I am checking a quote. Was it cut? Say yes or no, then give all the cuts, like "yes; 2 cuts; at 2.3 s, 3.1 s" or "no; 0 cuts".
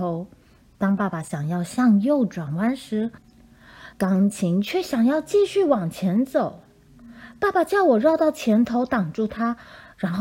yes; 1 cut; at 3.9 s